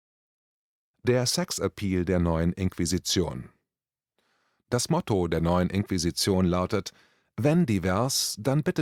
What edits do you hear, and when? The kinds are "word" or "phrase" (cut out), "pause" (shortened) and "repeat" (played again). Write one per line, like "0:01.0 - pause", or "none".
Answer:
none